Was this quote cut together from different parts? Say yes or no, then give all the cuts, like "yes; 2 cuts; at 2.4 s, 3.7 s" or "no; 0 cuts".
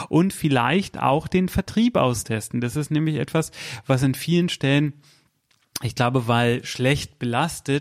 no; 0 cuts